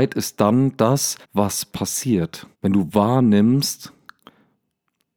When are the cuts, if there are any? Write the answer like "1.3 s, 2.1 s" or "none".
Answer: 1.2 s, 2.5 s